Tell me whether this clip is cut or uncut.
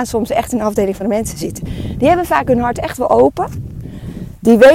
cut